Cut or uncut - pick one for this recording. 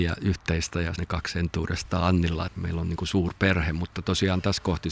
cut